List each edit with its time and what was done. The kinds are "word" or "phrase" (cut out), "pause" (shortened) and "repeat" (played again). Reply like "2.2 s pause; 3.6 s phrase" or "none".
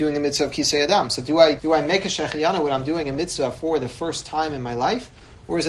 1.6 s word